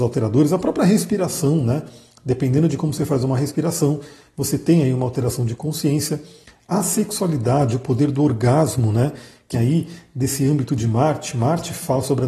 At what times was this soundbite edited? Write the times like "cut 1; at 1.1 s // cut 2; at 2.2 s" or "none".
cut 1; at 9.5 s